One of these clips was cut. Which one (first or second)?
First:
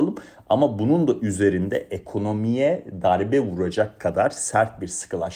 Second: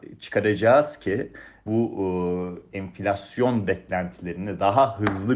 second